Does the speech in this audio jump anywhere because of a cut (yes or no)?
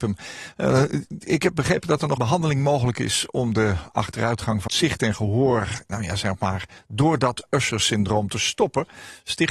yes